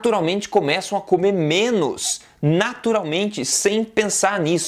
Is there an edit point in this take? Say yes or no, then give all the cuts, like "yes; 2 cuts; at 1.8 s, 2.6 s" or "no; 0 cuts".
no; 0 cuts